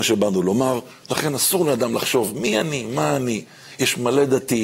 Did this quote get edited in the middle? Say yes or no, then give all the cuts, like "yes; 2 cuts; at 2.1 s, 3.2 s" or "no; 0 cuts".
no; 0 cuts